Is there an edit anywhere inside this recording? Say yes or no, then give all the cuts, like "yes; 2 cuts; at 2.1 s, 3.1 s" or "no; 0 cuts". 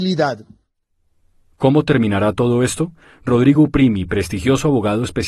no; 0 cuts